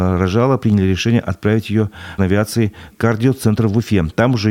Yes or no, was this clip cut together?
yes